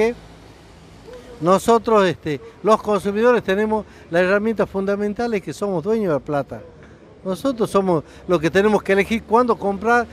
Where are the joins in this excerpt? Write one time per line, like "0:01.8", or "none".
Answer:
none